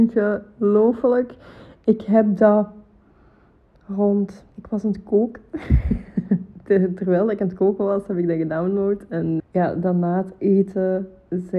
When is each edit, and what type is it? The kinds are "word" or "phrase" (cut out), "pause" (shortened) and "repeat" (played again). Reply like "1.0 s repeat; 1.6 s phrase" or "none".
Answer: 4.5 s pause; 9.4 s word